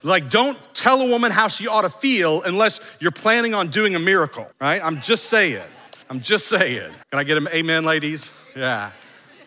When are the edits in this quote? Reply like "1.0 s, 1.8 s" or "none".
4.5 s, 6.0 s, 7.0 s